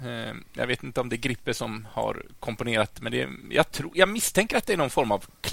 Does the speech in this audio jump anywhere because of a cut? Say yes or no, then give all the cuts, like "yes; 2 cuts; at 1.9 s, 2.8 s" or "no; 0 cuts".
no; 0 cuts